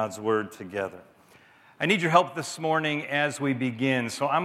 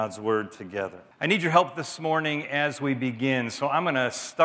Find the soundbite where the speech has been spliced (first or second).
second